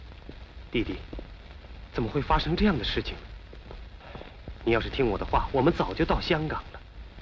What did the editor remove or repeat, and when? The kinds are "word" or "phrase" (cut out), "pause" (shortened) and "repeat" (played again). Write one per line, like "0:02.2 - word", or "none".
0:01.9 - phrase